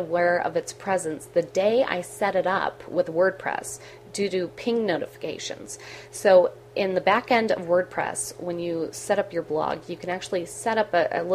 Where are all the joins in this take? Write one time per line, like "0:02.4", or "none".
none